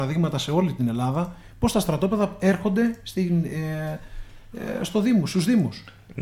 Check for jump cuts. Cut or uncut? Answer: uncut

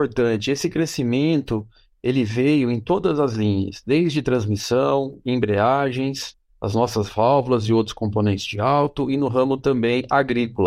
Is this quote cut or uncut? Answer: uncut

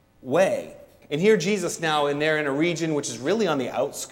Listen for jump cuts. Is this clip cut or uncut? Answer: uncut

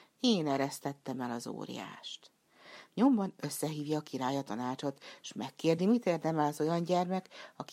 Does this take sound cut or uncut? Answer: uncut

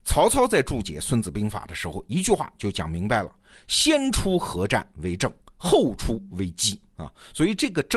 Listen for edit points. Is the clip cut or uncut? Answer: uncut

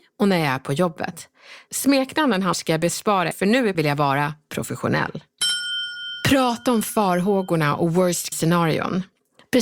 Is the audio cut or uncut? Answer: cut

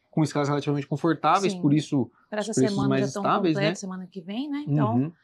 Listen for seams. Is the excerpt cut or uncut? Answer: uncut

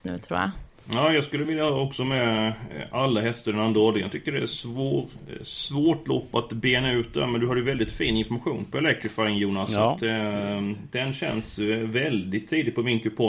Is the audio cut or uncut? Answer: uncut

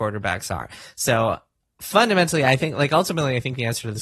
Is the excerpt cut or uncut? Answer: uncut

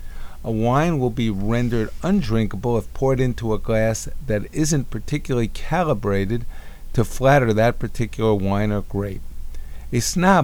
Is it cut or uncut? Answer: uncut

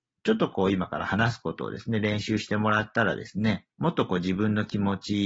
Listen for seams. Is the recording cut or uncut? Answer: cut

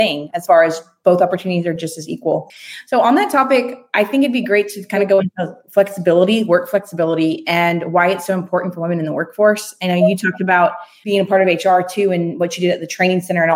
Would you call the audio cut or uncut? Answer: uncut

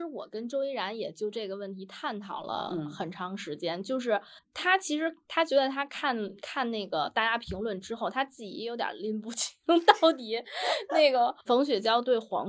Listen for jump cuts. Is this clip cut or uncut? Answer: cut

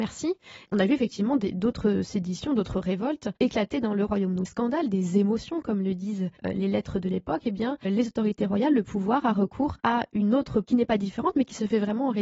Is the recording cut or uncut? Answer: cut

